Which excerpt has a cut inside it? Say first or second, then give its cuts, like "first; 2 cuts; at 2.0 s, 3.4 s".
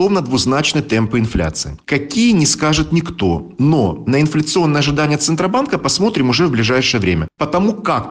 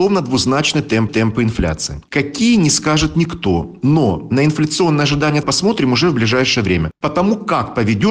second; 2 cuts; at 1.1 s, 5.4 s